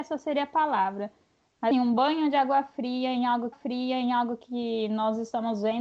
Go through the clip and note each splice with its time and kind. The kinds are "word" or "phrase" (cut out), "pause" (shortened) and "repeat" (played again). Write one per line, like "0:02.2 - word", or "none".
0:01.7 - word
0:03.5 - repeat